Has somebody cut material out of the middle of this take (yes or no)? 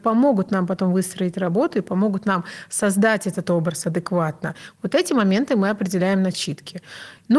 no